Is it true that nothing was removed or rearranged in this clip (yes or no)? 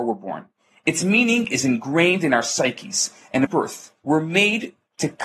no